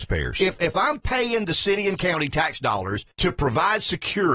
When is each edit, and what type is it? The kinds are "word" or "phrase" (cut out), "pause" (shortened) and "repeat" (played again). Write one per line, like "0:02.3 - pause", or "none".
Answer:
0:03.1 - pause